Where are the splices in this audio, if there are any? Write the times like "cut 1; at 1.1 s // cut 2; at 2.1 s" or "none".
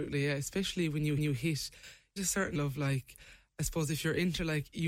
cut 1; at 1.2 s // cut 2; at 2.2 s // cut 3; at 2.5 s